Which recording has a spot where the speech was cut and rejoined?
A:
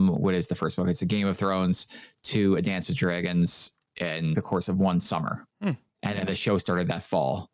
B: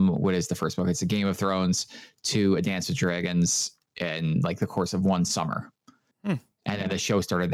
A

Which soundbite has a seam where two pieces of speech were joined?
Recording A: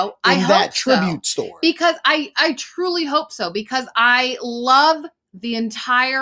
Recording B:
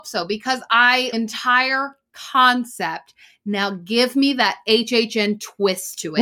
B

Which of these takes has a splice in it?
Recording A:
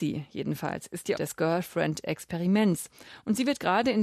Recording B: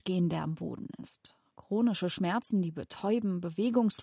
A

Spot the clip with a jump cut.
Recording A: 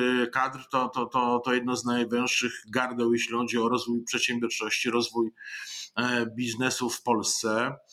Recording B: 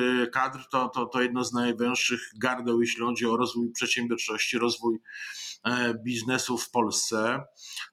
B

